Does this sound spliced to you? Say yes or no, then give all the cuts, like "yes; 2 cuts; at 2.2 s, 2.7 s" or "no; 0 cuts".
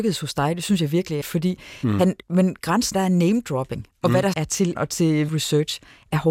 yes; 6 cuts; at 1.2 s, 2.2 s, 2.9 s, 4.3 s, 4.7 s, 5.3 s